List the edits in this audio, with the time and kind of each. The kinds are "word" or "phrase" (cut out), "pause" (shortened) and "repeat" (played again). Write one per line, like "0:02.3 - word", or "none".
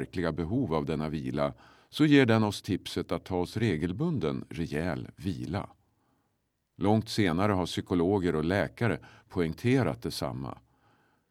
none